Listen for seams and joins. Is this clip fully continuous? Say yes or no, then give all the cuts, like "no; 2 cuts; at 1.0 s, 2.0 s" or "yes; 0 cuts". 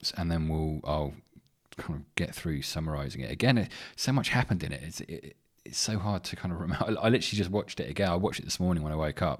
yes; 0 cuts